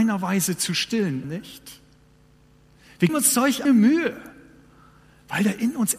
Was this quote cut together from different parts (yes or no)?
yes